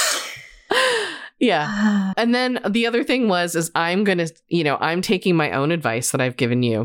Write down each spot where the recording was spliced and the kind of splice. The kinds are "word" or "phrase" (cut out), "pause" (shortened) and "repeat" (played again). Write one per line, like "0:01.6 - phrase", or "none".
0:02.1 - word